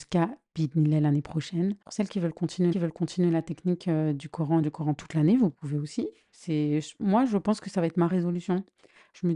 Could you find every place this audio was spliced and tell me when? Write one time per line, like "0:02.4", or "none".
0:01.8
0:02.7
0:04.6